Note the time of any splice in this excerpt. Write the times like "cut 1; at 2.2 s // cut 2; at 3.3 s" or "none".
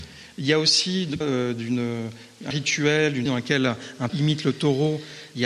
cut 1; at 1.2 s // cut 2; at 2.5 s // cut 3; at 3.3 s // cut 4; at 4.1 s